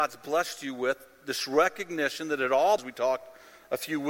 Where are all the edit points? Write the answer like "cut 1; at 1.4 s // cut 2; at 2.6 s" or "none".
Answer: cut 1; at 2.8 s

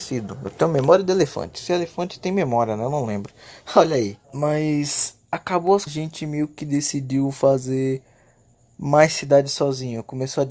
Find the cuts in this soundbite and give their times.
cut 1; at 4.2 s // cut 2; at 5.9 s

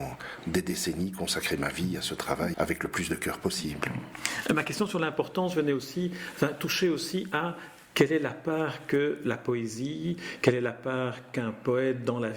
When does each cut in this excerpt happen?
cut 1; at 2.5 s

